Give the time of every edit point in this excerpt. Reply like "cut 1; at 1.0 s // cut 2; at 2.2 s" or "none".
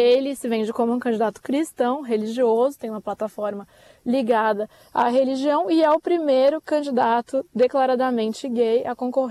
none

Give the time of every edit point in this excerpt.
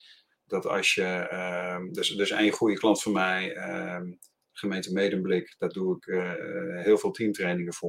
none

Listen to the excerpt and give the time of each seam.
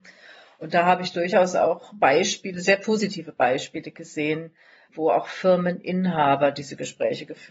cut 1; at 4.9 s

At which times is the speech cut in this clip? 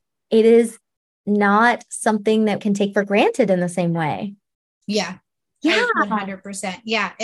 cut 1; at 2.6 s

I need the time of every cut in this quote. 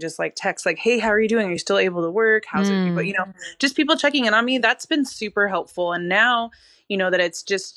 none

